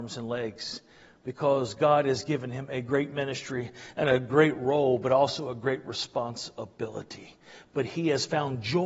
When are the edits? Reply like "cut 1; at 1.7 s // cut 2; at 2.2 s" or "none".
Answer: none